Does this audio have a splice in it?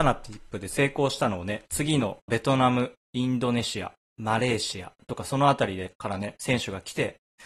yes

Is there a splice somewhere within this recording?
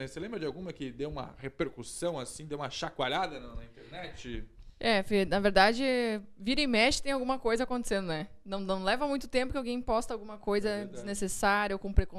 no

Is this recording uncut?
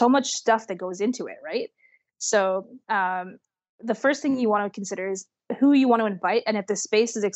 yes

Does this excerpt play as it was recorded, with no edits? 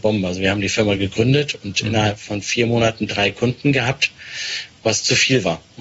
yes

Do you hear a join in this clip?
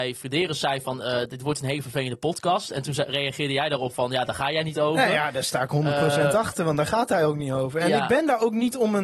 no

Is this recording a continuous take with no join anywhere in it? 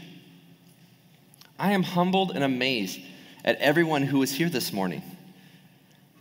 yes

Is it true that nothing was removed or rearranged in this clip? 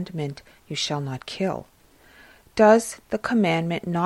yes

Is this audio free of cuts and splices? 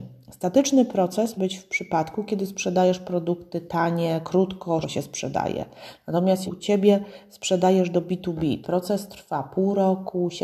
no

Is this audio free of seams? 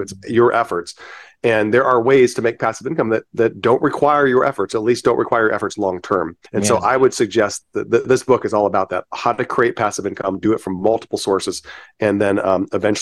no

